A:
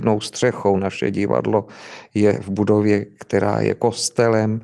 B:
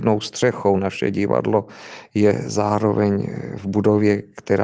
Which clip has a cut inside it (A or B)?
A